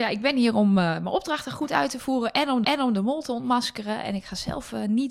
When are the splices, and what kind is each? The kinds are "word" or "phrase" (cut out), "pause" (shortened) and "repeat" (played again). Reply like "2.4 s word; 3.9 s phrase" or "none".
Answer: 2.6 s repeat